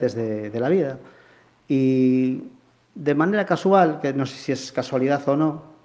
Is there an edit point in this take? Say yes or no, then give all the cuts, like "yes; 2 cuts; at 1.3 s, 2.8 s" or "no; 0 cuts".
no; 0 cuts